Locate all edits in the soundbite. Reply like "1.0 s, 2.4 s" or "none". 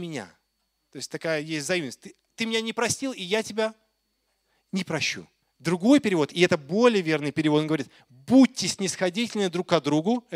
2.3 s, 5.4 s